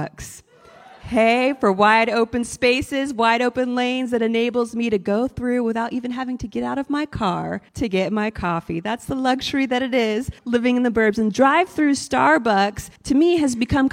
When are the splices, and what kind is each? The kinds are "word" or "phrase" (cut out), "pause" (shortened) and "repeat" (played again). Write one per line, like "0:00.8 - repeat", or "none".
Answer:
0:01.0 - pause
0:07.7 - pause
0:10.4 - pause
0:13.0 - pause

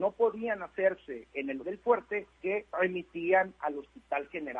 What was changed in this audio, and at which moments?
0:01.6 - word
0:02.3 - word
0:02.7 - word

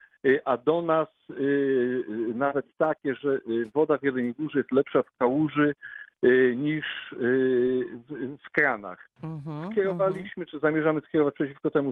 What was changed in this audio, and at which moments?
none

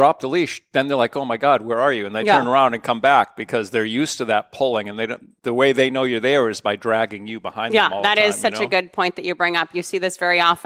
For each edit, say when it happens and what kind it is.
0:05.4 - pause

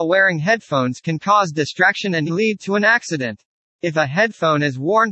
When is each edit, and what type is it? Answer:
0:02.3 - word
0:03.7 - pause

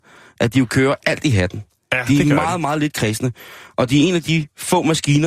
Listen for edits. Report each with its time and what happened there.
none

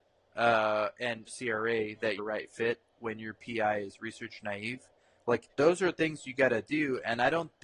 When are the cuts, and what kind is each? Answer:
0:01.3 - phrase
0:02.2 - word
0:05.5 - pause

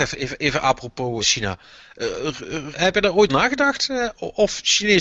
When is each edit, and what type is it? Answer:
0:01.2 - word
0:02.7 - word
0:03.3 - word

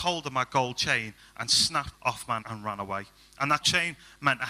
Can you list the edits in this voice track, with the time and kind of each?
0:01.9 - word
0:02.4 - word
0:03.6 - word

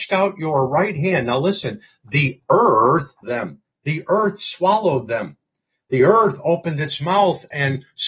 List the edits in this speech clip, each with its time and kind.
0:03.2 - word

